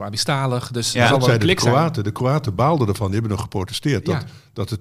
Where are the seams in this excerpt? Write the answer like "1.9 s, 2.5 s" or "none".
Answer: none